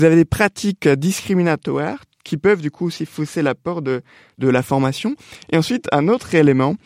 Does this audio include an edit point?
no; 0 cuts

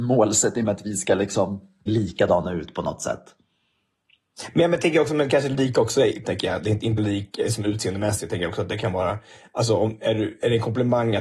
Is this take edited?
yes; 3 cuts; at 1.9 s, 6.2 s, 7.0 s

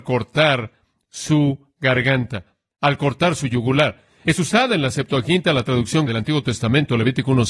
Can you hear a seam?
yes; 1 cut; at 6.1 s

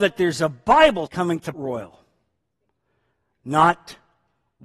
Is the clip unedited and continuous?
no; 2 cuts; at 1.1 s, 1.5 s

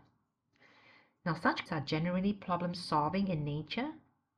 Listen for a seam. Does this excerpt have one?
yes; 1 cut; at 1.7 s

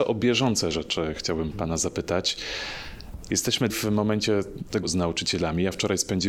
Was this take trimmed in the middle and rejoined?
yes; 3 cuts; at 1.5 s, 3.7 s, 4.8 s

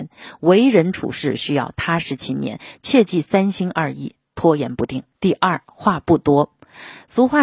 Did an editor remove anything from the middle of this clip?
yes; 1 cut; at 5.1 s

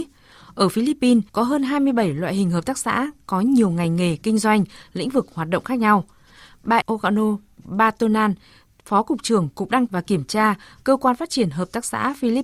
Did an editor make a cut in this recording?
yes; 3 cuts; at 1.3 s, 6.8 s, 9.9 s

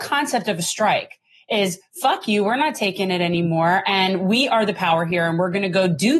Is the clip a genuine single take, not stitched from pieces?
yes; 0 cuts

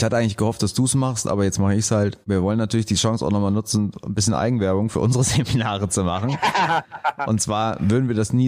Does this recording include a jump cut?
yes; 1 cut; at 2.2 s

